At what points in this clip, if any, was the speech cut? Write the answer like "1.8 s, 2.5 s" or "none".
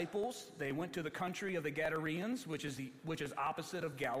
none

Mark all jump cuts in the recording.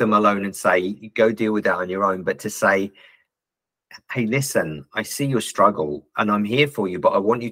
none

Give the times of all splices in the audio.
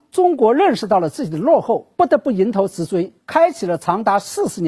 1.9 s, 3.2 s

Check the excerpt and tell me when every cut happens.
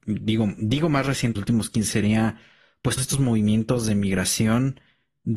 1.4 s, 1.9 s, 3.0 s

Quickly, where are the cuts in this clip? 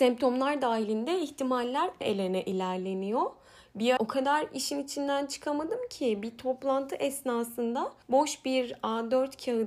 2.0 s, 4.0 s, 8.0 s

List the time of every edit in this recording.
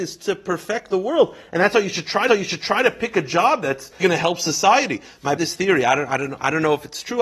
2.3 s, 4.0 s, 5.4 s

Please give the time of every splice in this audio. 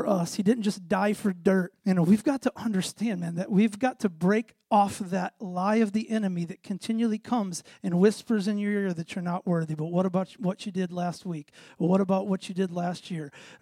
1.8 s, 4.6 s

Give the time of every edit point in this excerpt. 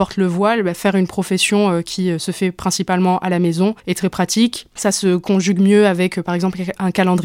3.8 s

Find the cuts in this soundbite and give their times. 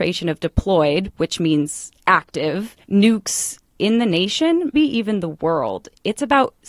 2.8 s, 4.7 s

